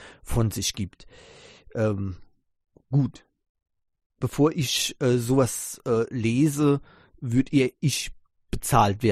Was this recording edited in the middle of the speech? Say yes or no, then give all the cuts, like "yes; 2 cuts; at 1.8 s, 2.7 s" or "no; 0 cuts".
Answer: no; 0 cuts